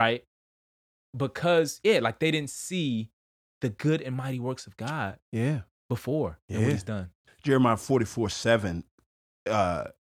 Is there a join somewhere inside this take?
yes; 1 cut; at 7.3 s

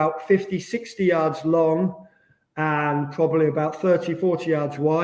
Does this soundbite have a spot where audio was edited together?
no; 0 cuts

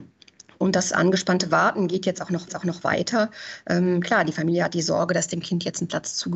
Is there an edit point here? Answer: yes; 1 cut; at 2.5 s

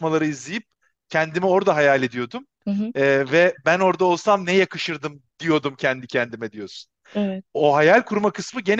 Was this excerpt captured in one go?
yes; 0 cuts

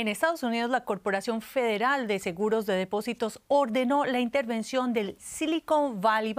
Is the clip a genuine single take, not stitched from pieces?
yes; 0 cuts

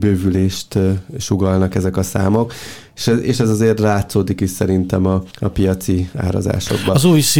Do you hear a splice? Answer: yes; 1 cut; at 5.3 s

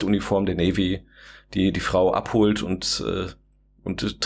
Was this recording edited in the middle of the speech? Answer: no; 0 cuts

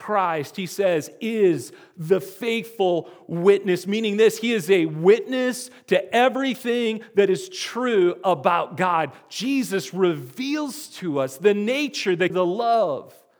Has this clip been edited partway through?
yes; 1 cut; at 12.3 s

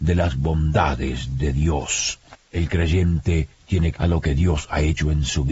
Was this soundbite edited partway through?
yes; 3 cuts; at 2.3 s, 3.5 s, 4.0 s

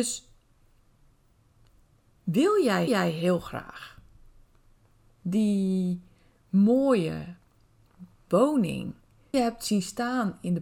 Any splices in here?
yes; 2 cuts; at 2.9 s, 9.3 s

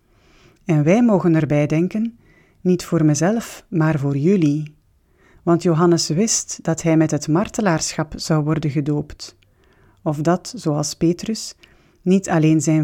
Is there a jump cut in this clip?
no; 0 cuts

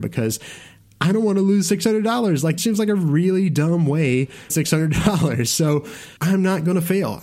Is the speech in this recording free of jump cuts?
no; 3 cuts; at 2.6 s, 4.5 s, 6.2 s

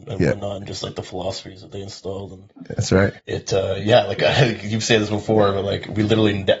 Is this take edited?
yes; 1 cut; at 3.2 s

